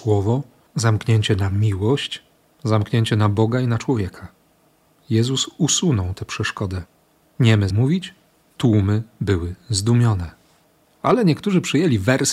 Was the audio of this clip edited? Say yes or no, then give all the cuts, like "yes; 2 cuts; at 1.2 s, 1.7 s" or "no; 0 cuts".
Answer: yes; 1 cut; at 7.7 s